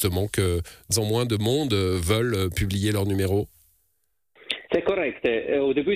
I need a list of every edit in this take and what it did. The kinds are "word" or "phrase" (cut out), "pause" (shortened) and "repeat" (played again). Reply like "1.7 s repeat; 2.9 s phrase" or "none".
0.9 s word; 4.7 s pause